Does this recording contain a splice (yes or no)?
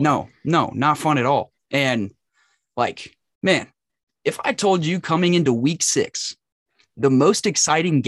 no